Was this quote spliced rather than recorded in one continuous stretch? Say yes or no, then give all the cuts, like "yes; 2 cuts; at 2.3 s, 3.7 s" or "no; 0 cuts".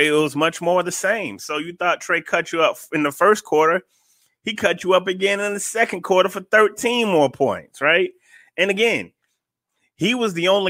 no; 0 cuts